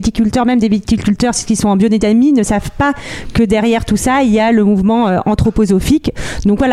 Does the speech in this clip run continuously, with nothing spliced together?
yes; 0 cuts

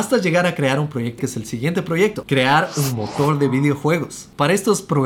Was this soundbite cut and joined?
yes; 1 cut; at 1.2 s

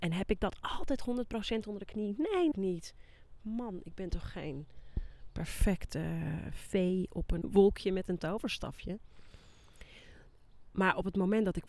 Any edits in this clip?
yes; 2 cuts; at 2.5 s, 7.4 s

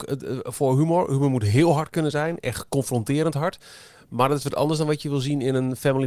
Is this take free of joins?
yes; 0 cuts

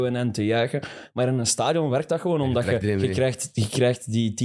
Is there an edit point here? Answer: yes; 1 cut; at 2.8 s

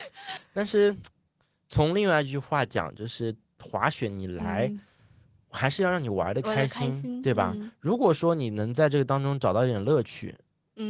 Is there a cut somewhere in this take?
no; 0 cuts

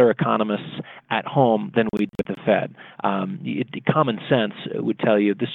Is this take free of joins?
yes; 0 cuts

